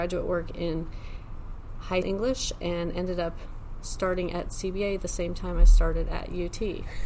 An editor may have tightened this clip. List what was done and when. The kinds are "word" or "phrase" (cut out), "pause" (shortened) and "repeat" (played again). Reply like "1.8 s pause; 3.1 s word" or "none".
2.0 s word